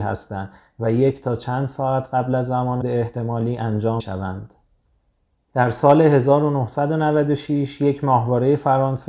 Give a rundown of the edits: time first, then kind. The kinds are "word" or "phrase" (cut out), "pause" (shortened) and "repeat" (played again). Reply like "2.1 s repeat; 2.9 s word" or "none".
2.8 s word; 4.0 s word